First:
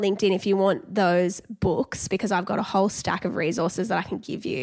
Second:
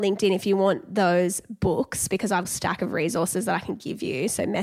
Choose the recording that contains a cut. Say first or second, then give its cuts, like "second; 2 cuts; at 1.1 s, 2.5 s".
second; 1 cut; at 2.4 s